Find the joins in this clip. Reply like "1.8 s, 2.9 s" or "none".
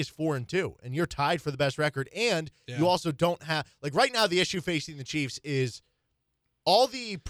none